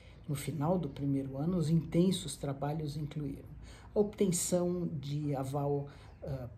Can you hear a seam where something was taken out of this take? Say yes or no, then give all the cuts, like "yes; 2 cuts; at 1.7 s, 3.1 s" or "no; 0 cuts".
no; 0 cuts